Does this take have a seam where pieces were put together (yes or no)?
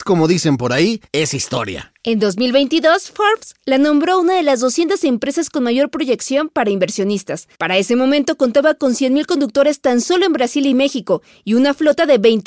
yes